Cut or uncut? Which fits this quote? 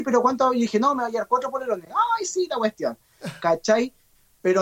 uncut